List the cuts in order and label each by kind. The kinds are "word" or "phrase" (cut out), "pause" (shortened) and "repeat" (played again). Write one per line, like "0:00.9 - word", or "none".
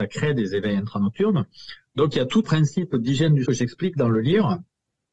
0:02.4 - word
0:03.4 - word